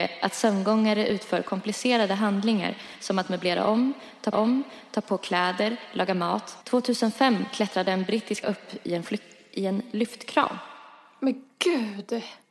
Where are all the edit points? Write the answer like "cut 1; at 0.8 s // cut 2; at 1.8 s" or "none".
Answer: cut 1; at 4.3 s // cut 2; at 6.6 s // cut 3; at 8.4 s

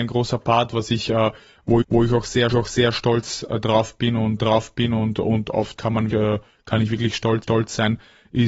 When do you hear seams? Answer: cut 1; at 1.8 s // cut 2; at 2.5 s // cut 3; at 4.4 s // cut 4; at 5.8 s // cut 5; at 6.1 s // cut 6; at 7.4 s

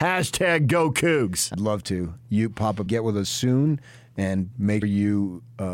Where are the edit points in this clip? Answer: cut 1; at 1.5 s // cut 2; at 2.9 s // cut 3; at 4.8 s

